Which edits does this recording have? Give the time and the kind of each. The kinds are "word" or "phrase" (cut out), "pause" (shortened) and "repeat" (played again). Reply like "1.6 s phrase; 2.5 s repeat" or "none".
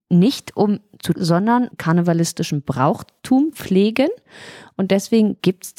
1.1 s word; 1.7 s word; 3.5 s word